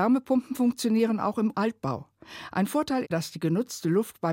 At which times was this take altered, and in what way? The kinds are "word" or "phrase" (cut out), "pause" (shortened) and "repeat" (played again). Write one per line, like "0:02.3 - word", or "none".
0:01.5 - word
0:03.0 - word